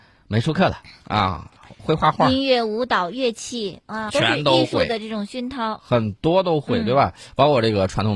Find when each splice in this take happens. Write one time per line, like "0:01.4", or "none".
0:04.1